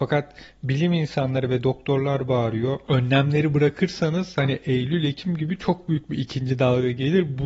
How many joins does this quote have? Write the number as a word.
zero